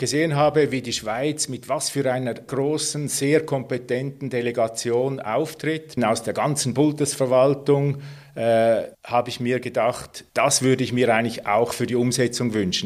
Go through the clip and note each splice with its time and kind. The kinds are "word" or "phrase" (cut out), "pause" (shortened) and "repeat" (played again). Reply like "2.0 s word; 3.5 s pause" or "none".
2.5 s word; 6.0 s phrase; 8.9 s pause; 10.3 s pause